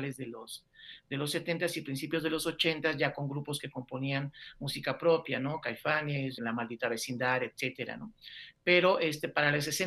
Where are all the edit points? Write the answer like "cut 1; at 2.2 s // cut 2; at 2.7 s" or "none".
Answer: cut 1; at 6.4 s